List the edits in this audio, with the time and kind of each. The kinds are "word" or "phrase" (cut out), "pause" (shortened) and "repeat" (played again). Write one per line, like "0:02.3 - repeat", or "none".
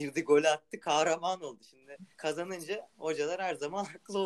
0:02.1 - pause